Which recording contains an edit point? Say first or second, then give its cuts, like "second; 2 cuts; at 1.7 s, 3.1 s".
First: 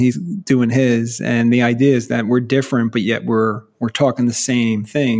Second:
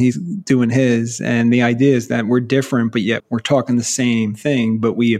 second; 1 cut; at 3.2 s